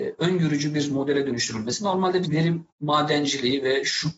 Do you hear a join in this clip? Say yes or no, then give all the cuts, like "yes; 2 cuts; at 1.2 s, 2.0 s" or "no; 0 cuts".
yes; 2 cuts; at 2.2 s, 2.7 s